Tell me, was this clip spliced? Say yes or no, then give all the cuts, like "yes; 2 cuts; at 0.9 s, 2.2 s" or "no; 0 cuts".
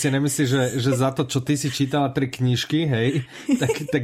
no; 0 cuts